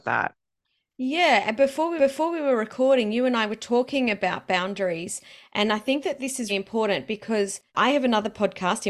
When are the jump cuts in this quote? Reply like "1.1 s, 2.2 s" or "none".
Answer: 2.0 s, 6.5 s, 7.7 s